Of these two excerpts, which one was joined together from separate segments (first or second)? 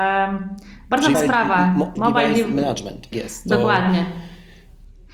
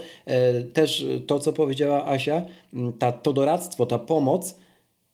first